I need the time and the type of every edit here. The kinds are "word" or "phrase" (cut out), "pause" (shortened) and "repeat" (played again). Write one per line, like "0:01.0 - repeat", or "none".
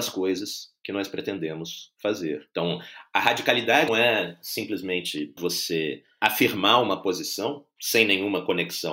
0:03.9 - word
0:05.4 - word